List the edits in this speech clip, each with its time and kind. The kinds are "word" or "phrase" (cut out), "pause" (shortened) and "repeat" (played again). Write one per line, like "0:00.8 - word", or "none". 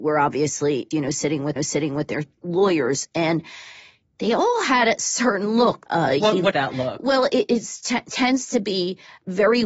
0:00.9 - word
0:01.6 - repeat
0:06.5 - word